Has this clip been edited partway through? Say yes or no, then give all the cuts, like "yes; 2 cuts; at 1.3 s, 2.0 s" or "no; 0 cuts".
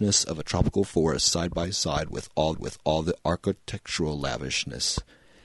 yes; 1 cut; at 2.5 s